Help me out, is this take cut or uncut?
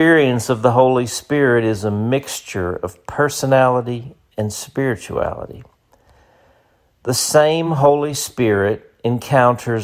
uncut